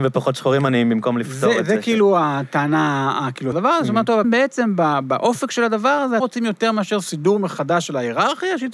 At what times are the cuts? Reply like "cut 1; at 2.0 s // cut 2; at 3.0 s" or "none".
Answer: cut 1; at 3.5 s // cut 2; at 4.2 s // cut 3; at 6.2 s